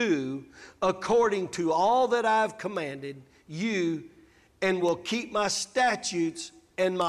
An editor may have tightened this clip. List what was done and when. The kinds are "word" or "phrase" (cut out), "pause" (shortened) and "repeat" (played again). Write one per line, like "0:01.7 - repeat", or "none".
none